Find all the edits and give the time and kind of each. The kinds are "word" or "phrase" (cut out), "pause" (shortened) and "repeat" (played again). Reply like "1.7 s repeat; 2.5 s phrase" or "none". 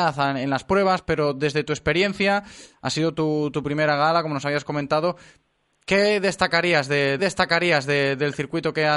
7.2 s repeat